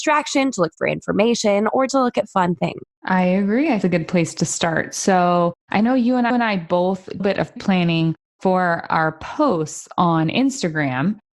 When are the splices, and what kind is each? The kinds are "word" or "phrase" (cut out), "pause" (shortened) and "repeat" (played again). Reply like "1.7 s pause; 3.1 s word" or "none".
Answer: 1.9 s word; 2.9 s pause; 3.8 s phrase; 5.6 s pause; 6.3 s repeat; 7.2 s phrase; 7.6 s word